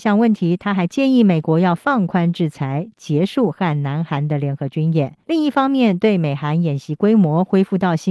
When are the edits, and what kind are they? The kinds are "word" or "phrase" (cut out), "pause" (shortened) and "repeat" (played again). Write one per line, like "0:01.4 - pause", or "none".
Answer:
0:05.2 - pause

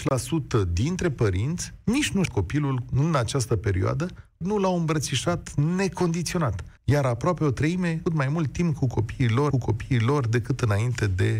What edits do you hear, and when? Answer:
0:02.3 - phrase
0:04.4 - word
0:06.8 - pause
0:08.1 - phrase
0:09.5 - repeat

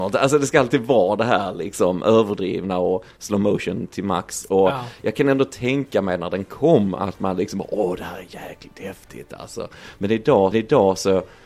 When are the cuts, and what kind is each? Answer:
0:10.5 - repeat

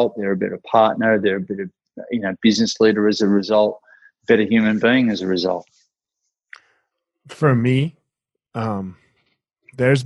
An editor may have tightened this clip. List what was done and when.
none

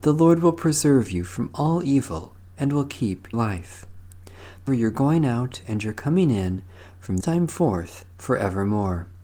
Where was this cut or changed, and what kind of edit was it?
0:03.3 - word
0:04.7 - phrase
0:07.2 - word
0:08.1 - pause

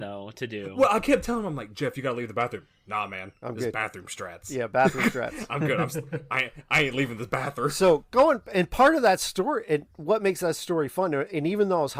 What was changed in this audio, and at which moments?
none

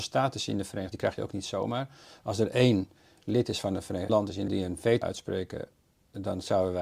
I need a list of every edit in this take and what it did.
0:00.9 - word
0:04.1 - word
0:04.5 - word
0:05.0 - word

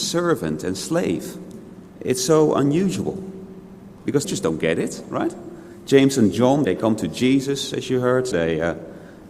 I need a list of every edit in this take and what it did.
0:01.9 - pause
0:04.2 - phrase
0:06.6 - word
0:08.3 - word

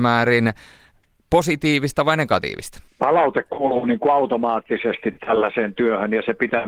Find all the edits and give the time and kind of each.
none

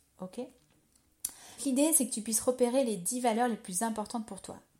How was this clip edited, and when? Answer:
0:01.6 - word

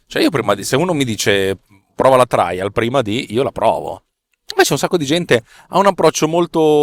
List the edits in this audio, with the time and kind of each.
none

